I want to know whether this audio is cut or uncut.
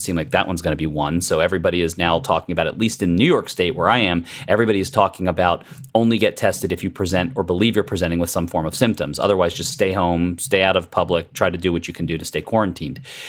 uncut